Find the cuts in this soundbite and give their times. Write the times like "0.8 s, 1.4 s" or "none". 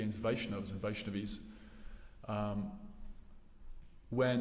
none